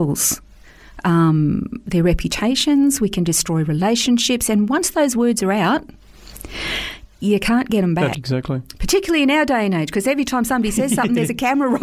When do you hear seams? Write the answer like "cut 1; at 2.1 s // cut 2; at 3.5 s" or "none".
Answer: cut 1; at 8.1 s